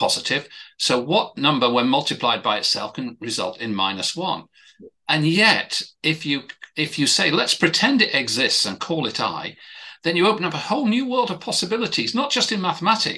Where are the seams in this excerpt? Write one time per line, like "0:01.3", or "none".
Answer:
none